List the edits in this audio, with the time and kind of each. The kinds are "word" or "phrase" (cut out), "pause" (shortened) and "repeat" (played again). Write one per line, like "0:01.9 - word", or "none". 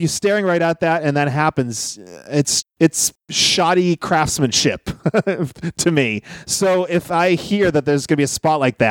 0:02.6 - word